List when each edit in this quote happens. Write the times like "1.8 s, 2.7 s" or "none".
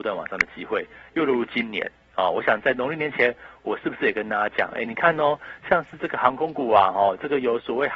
none